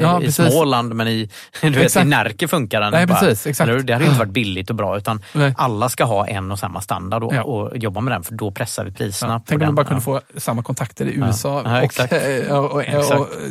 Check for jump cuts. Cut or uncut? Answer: uncut